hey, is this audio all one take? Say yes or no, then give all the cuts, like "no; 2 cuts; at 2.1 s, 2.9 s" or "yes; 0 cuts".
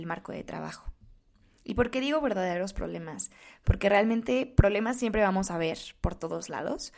yes; 0 cuts